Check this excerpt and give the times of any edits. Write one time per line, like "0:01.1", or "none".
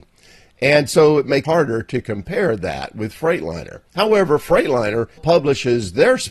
0:01.4
0:03.9
0:05.2